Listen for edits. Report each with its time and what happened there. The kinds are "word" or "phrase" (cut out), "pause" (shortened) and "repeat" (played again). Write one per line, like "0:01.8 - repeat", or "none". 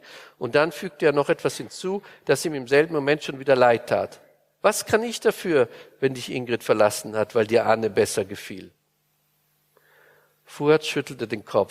none